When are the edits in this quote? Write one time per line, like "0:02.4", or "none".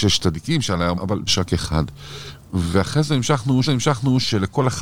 0:01.0
0:01.3
0:03.6